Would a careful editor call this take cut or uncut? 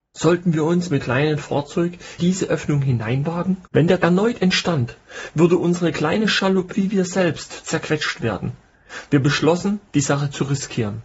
cut